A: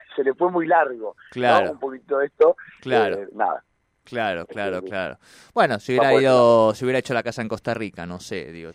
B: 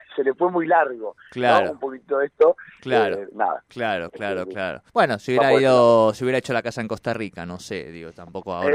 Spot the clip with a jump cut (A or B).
B